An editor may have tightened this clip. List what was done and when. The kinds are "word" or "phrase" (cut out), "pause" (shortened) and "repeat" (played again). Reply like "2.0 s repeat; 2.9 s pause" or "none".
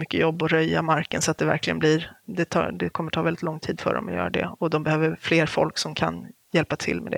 none